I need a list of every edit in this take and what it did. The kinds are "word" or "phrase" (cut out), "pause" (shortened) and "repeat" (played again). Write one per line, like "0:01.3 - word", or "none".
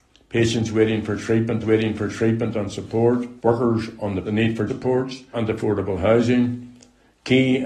0:01.6 - repeat
0:03.4 - pause
0:04.2 - phrase
0:04.7 - word
0:05.3 - word